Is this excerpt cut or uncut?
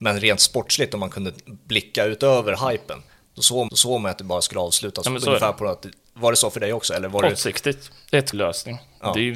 cut